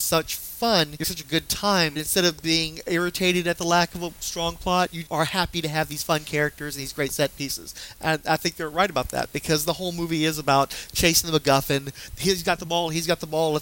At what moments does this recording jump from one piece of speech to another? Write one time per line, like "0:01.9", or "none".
0:01.0
0:02.0
0:05.1